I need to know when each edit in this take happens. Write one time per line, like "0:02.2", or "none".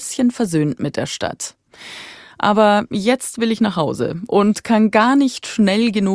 none